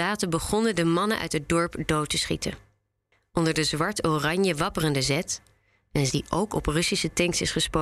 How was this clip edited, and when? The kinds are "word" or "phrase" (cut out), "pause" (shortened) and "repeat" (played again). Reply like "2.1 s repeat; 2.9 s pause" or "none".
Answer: 6.1 s word

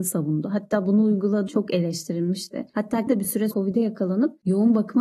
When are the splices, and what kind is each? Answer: 1.5 s word; 3.1 s word; 3.5 s word

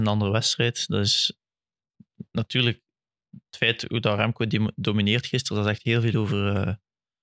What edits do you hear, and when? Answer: none

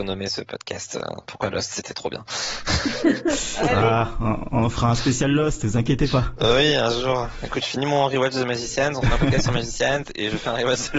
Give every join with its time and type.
none

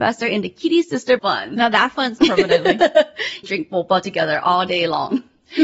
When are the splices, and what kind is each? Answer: 1.2 s word; 2.2 s word; 3.4 s phrase

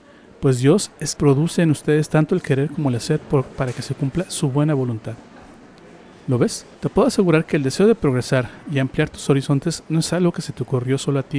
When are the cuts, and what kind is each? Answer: 1.1 s word; 6.7 s pause

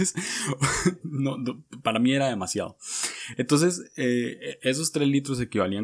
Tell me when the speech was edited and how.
none

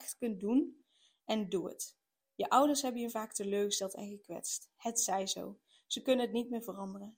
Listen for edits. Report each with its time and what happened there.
3.1 s word

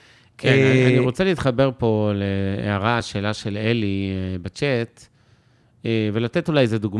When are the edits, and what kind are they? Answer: none

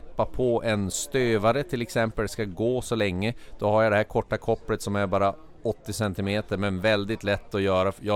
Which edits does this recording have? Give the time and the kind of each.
2.3 s phrase

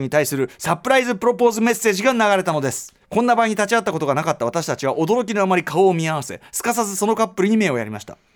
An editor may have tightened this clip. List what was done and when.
3.0 s pause

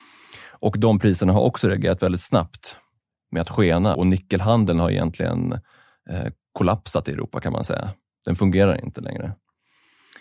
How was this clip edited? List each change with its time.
3.9 s word

